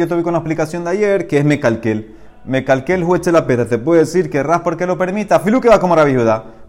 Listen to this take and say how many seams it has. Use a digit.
0